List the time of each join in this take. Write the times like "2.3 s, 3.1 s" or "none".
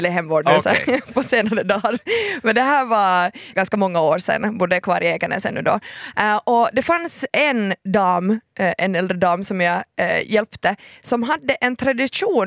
3.5 s